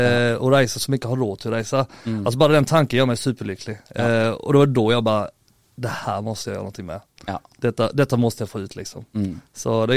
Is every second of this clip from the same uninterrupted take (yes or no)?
yes